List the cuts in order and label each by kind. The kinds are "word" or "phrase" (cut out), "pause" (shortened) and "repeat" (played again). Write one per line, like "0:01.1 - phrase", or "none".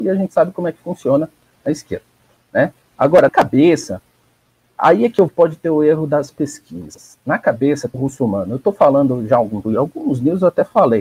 0:03.3 - word
0:05.3 - word
0:07.9 - word
0:09.6 - word